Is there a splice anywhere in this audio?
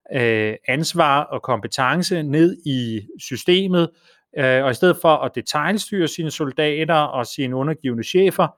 no; 0 cuts

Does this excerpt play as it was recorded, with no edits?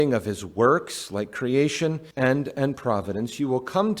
no; 1 cut; at 2.1 s

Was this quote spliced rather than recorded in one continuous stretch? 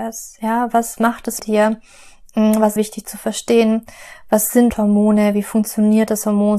yes; 4 cuts; at 1.0 s, 1.4 s, 2.8 s, 4.7 s

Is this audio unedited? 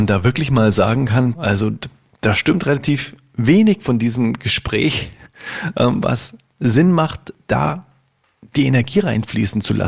no; 1 cut; at 1.3 s

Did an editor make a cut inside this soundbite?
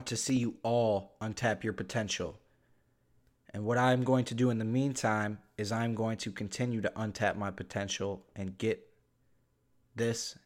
no; 0 cuts

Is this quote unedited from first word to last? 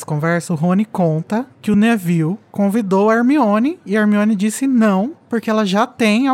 yes; 0 cuts

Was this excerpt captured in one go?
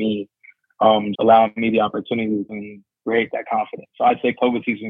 no; 2 cuts; at 1.1 s, 2.5 s

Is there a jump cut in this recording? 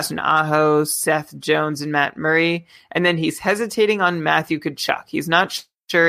no; 0 cuts

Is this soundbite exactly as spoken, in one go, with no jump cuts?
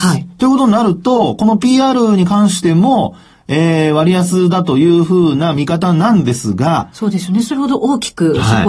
yes; 0 cuts

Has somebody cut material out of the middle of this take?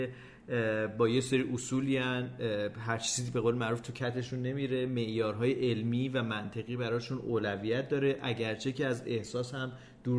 no; 0 cuts

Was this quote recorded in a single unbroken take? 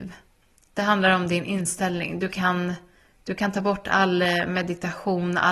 yes; 0 cuts

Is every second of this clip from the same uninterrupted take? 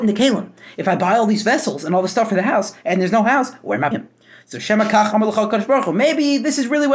no; 1 cut; at 3.9 s

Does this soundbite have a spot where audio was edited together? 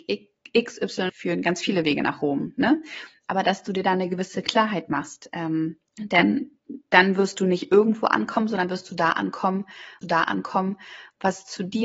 yes; 4 cuts; at 1.1 s, 5.9 s, 8.7 s, 10.0 s

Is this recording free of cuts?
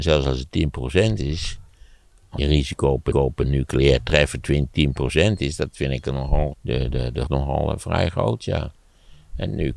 no; 4 cuts; at 2.4 s, 3.1 s, 6.5 s, 7.3 s

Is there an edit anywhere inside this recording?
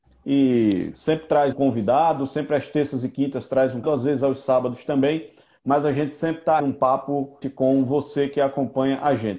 yes; 4 cuts; at 1.5 s, 3.8 s, 6.6 s, 7.4 s

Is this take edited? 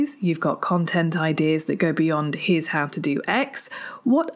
no; 0 cuts

